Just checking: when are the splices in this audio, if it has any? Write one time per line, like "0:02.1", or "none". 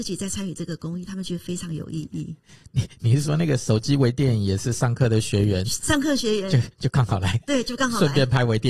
none